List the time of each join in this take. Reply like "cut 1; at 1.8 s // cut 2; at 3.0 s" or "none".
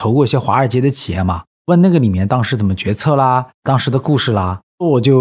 none